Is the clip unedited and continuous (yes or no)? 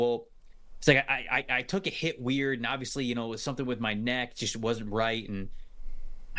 yes